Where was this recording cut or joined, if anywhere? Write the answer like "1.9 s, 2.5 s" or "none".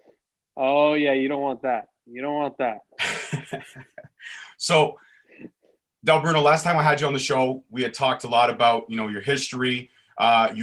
none